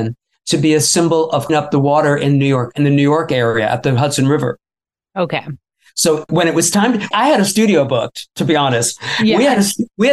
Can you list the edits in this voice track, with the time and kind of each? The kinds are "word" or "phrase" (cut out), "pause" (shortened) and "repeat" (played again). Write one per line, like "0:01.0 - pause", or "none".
0:01.5 - word
0:06.3 - word
0:07.1 - word